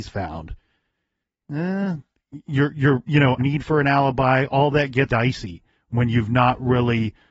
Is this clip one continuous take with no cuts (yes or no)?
no